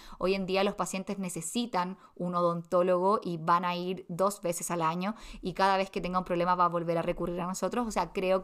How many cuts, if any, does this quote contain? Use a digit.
0